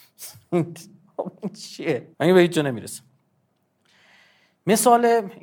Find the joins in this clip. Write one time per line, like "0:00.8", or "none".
0:02.1